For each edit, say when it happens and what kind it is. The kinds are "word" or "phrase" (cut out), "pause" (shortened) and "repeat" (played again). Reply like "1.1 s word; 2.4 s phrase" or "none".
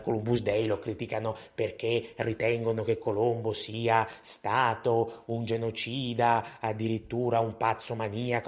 none